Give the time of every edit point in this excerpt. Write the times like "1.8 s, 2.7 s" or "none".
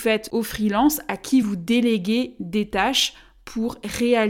none